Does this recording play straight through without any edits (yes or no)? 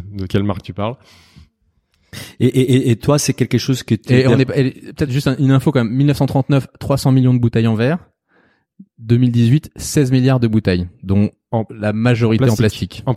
yes